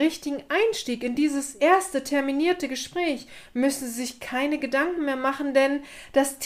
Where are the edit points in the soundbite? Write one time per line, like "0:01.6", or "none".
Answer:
none